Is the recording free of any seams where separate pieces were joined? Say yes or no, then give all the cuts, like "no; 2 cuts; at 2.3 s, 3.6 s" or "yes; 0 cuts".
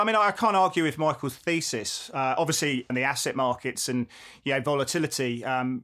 no; 1 cut; at 2.9 s